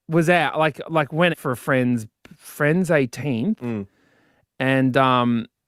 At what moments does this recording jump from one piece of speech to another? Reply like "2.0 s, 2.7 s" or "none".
1.3 s